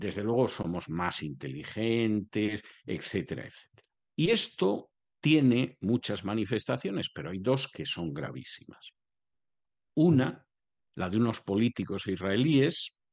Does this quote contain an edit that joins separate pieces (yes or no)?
no